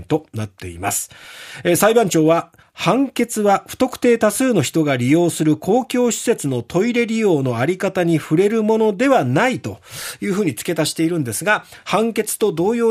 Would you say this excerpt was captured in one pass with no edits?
no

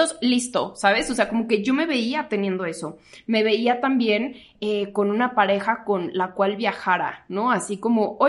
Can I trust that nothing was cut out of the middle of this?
yes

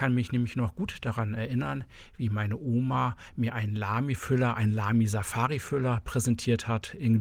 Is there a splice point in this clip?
no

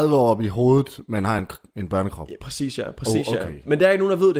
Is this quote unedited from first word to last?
yes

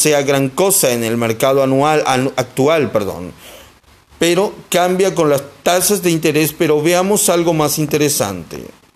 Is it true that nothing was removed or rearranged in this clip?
yes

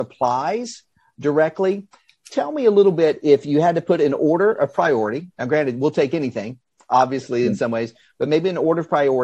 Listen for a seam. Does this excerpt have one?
no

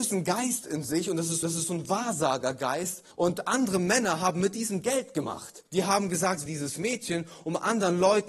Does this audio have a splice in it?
yes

